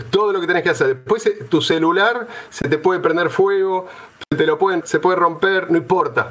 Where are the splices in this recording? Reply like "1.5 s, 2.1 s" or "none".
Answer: 4.8 s